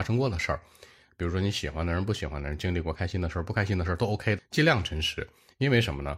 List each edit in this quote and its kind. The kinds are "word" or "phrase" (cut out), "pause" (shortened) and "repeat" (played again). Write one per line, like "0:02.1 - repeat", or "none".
0:04.4 - word